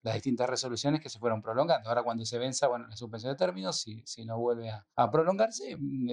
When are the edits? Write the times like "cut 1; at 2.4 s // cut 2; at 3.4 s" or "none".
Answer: cut 1; at 4.9 s